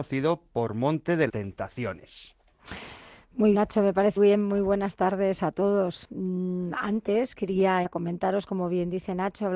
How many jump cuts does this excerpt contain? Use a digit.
4